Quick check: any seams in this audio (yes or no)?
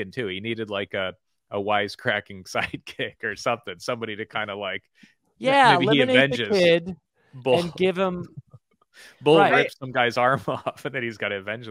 no